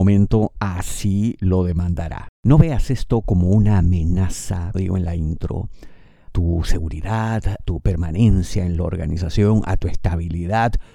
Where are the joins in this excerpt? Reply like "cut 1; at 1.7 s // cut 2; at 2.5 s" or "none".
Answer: cut 1; at 4.7 s // cut 2; at 6.3 s // cut 3; at 7.6 s